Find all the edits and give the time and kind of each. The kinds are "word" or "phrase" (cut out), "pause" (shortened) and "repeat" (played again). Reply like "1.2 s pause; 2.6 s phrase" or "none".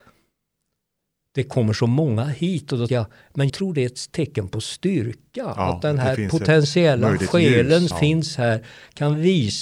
2.9 s word; 3.5 s word; 7.9 s word